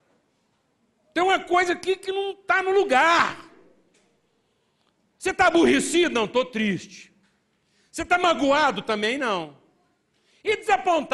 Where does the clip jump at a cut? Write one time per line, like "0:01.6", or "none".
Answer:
none